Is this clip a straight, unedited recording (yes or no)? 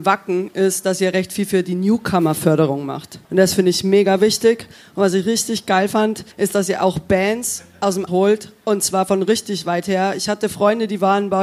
no